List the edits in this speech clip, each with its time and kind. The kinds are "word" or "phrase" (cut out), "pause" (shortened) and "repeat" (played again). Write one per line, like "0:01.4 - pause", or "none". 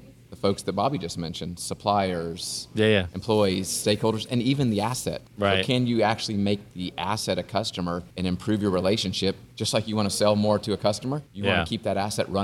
0:05.3 - pause
0:08.1 - pause
0:09.5 - pause
0:11.3 - pause